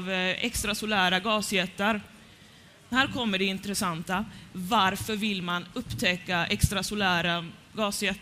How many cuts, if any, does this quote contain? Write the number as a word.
zero